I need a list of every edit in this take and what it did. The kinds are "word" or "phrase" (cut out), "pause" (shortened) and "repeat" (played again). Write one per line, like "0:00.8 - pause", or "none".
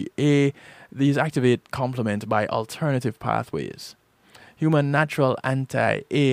none